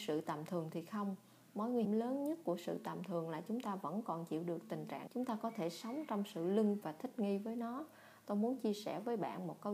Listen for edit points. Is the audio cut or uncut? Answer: cut